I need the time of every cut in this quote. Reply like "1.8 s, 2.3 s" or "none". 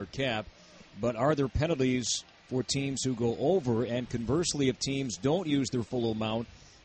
none